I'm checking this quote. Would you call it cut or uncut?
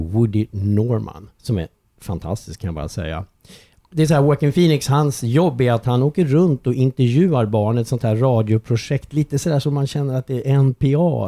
cut